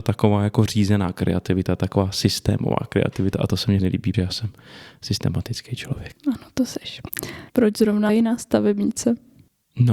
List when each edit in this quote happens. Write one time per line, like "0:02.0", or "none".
0:03.8
0:04.1
0:06.2
0:07.5
0:08.1